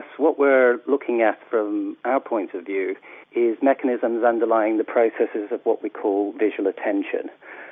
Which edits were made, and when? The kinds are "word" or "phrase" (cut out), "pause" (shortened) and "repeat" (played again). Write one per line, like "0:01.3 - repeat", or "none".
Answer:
0:03.2 - pause